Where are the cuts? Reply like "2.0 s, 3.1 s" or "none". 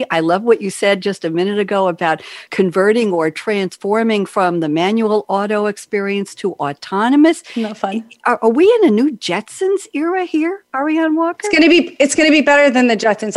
2.5 s